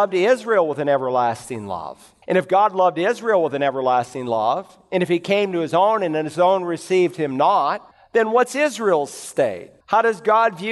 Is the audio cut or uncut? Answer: cut